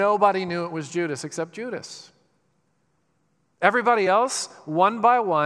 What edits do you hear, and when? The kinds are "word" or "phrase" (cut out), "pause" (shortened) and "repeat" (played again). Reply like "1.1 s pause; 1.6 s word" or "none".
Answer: none